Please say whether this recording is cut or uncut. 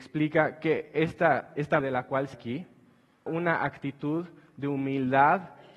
cut